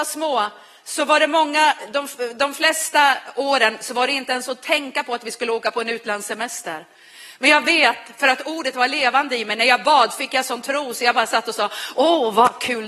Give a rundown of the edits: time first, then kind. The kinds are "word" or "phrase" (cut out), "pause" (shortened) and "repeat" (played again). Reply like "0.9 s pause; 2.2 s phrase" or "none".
none